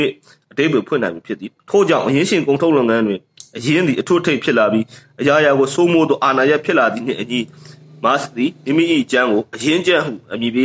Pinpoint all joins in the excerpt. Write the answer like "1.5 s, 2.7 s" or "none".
1.6 s